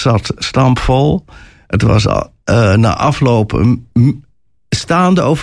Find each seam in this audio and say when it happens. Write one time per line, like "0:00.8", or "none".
none